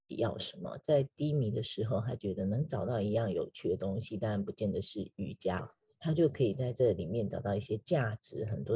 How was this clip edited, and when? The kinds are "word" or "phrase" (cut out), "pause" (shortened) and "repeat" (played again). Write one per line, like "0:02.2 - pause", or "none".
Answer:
none